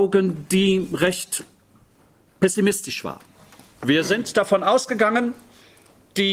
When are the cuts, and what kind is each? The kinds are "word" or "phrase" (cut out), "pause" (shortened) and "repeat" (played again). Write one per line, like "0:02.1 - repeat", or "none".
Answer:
none